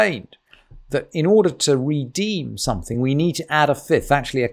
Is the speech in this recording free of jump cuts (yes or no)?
yes